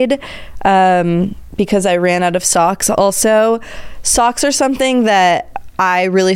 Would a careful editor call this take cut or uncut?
uncut